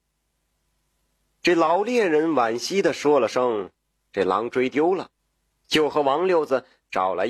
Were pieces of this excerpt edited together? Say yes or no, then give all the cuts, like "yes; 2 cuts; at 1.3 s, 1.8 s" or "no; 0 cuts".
yes; 1 cut; at 5.2 s